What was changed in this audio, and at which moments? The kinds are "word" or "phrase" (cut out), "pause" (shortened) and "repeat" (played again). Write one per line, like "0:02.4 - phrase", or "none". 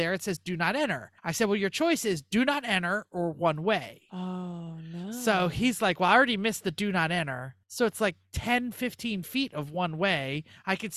0:01.2 - pause
0:07.6 - pause